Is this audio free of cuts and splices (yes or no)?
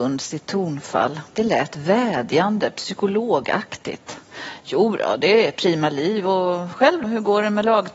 no